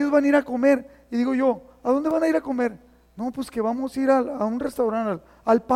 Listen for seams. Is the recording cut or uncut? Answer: uncut